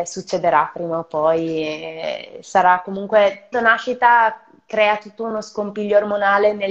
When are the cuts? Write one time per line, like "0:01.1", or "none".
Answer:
0:03.5